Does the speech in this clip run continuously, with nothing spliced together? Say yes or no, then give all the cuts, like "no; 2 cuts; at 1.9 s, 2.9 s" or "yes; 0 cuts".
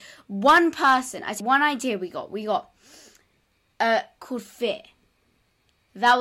no; 2 cuts; at 1.4 s, 4.2 s